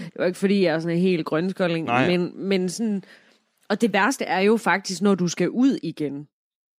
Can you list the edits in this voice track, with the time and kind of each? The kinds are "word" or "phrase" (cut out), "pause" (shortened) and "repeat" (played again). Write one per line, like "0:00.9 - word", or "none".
none